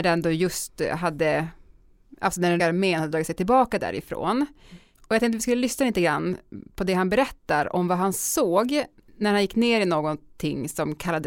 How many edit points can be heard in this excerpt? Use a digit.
1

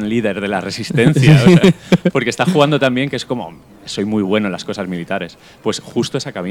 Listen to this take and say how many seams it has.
0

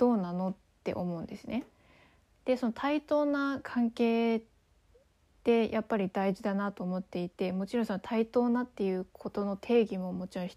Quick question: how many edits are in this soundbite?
0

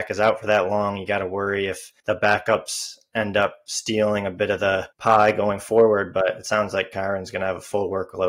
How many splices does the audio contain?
2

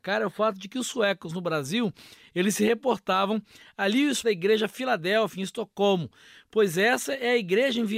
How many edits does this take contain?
1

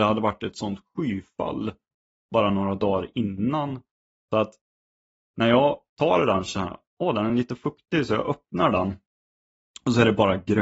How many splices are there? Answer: 0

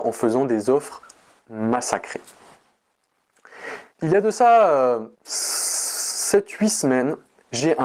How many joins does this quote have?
2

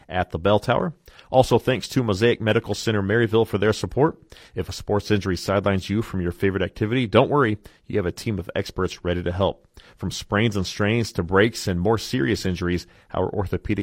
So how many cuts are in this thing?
0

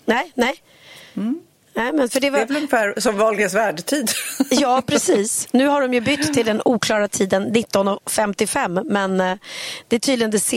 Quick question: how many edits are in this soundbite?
0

